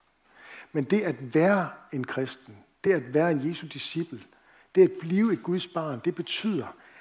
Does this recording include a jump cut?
no; 0 cuts

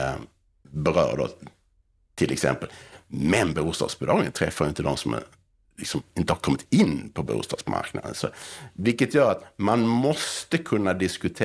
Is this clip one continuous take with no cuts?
yes; 0 cuts

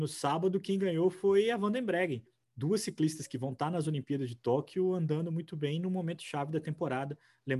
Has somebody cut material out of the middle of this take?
no; 0 cuts

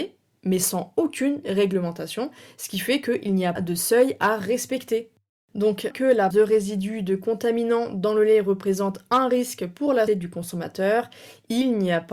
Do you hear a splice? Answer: yes; 4 cuts; at 3.6 s, 5.9 s, 6.3 s, 10.1 s

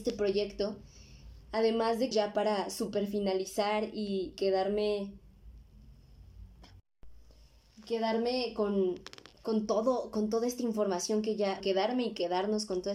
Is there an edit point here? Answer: yes; 4 cuts; at 2.1 s, 4.3 s, 9.3 s, 11.6 s

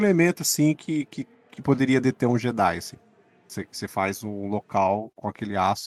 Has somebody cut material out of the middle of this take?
no; 0 cuts

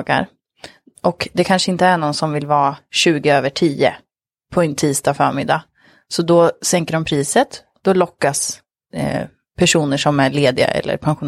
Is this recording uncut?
yes; 0 cuts

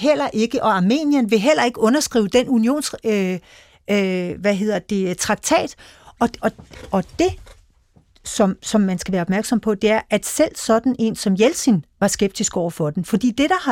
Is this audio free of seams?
yes; 0 cuts

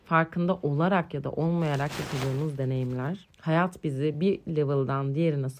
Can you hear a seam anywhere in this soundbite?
no; 0 cuts

